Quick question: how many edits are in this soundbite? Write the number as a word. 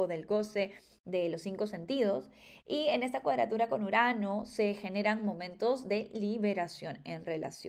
zero